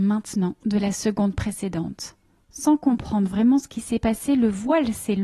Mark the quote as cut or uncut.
uncut